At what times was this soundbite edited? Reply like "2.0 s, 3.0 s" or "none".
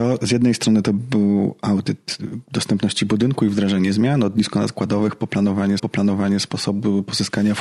5.8 s